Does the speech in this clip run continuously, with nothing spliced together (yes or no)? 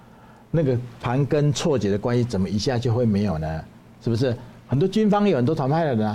yes